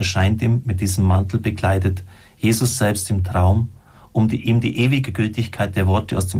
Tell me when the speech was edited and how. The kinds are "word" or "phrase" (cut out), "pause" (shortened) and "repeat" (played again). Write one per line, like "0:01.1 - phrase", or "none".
none